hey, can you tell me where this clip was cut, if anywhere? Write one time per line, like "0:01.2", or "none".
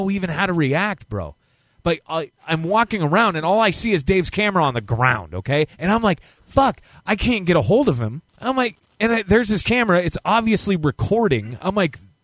0:05.7
0:08.3